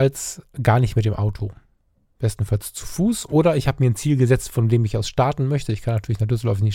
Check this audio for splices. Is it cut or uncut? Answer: uncut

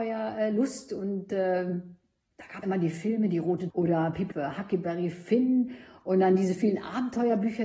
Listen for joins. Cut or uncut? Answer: cut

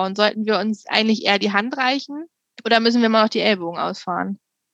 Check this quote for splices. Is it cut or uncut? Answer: cut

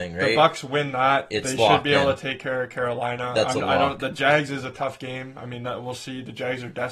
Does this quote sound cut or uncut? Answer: uncut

